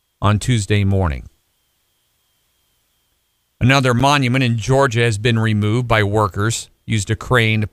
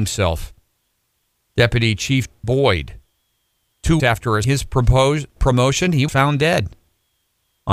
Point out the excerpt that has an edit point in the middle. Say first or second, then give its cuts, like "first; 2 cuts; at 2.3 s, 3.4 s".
second; 5 cuts; at 2.4 s, 4.0 s, 4.4 s, 5.4 s, 6.1 s